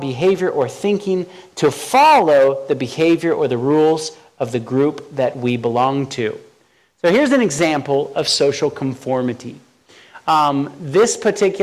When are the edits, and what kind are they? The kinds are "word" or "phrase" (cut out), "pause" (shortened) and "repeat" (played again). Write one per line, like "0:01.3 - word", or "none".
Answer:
none